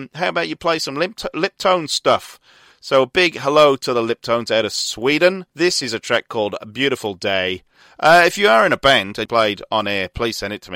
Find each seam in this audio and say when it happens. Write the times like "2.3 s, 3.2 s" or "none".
5.5 s, 9.3 s

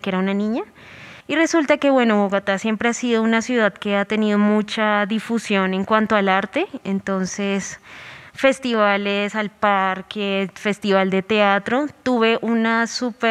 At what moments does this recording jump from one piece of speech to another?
1.2 s

